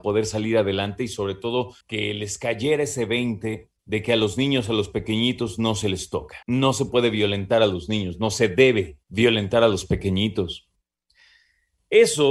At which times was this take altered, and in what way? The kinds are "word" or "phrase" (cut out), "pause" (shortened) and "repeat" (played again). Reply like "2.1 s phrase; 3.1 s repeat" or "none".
1.8 s pause; 3.8 s pause; 6.4 s pause; 9.0 s pause

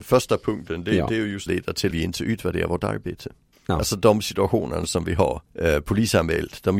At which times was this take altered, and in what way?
1.5 s phrase; 1.9 s word; 3.5 s pause; 5.5 s pause

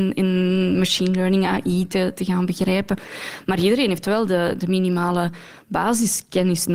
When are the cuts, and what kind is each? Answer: none

